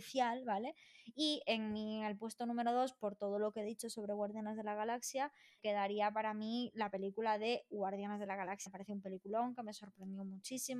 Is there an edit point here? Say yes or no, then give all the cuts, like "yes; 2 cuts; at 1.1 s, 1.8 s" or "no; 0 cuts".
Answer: yes; 2 cuts; at 5.6 s, 8.7 s